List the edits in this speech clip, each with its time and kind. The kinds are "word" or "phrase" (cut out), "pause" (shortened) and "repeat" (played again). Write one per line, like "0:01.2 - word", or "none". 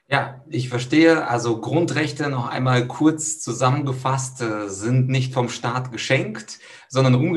none